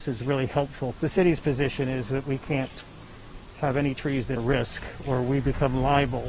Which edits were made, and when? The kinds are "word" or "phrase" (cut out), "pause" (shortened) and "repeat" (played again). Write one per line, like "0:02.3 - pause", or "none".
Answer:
0:01.0 - word
0:04.4 - word